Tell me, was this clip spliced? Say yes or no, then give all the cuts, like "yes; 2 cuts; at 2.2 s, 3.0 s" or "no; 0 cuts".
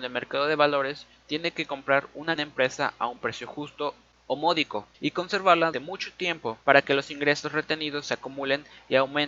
yes; 4 cuts; at 2.4 s, 4.9 s, 5.7 s, 6.6 s